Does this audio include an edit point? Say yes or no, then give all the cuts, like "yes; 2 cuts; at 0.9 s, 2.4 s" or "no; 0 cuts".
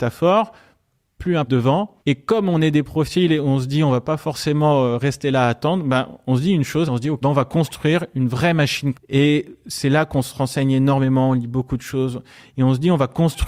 yes; 5 cuts; at 1.5 s, 2.0 s, 6.9 s, 7.2 s, 8.9 s